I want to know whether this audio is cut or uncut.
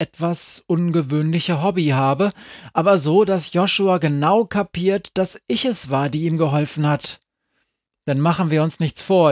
uncut